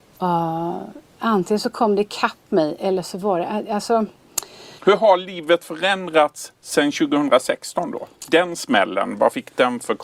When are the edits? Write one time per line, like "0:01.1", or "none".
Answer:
0:04.8
0:08.2

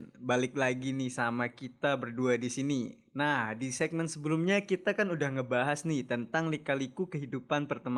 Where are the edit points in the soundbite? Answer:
none

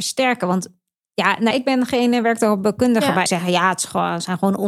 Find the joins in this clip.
0:01.5
0:03.3

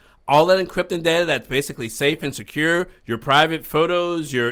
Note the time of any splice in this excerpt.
none

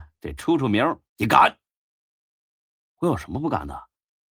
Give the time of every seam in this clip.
0:01.1

